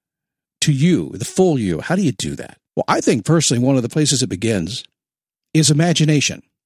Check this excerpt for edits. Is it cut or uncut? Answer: cut